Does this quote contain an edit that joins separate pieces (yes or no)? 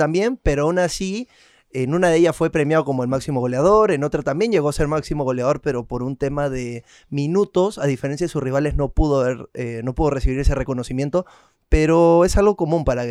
no